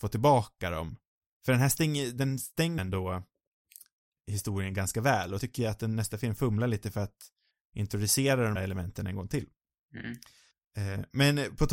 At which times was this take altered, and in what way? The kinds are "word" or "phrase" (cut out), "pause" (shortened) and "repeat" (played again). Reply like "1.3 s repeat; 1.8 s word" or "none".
2.8 s word; 4.2 s word; 5.4 s word; 8.6 s word